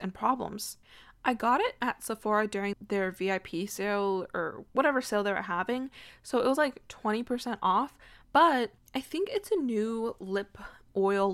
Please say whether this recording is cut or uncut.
cut